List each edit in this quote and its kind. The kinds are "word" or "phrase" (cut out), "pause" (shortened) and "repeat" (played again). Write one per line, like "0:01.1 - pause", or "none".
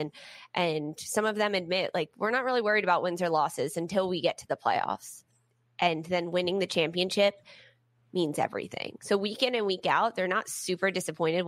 none

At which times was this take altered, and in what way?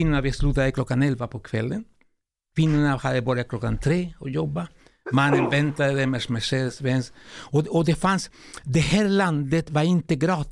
none

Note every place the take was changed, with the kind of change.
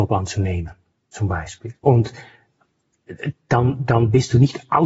0:00.9 - pause
0:01.8 - pause

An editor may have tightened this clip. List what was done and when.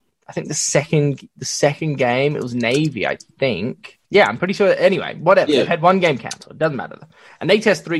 0:04.0 - pause

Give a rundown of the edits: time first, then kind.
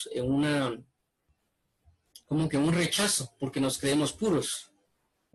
0:02.2 - pause

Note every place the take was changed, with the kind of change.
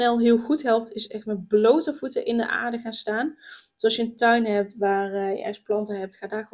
none

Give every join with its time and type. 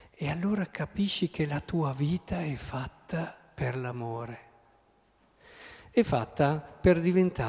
none

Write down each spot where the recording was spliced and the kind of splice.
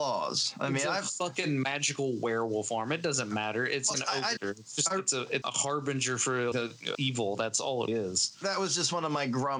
0:03.9 - word
0:04.4 - word
0:05.4 - word
0:06.5 - word
0:06.9 - word
0:07.9 - word

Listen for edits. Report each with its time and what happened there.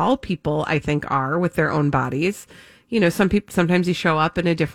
none

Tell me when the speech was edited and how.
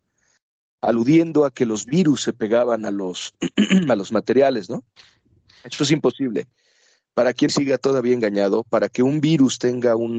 0:07.5 - phrase

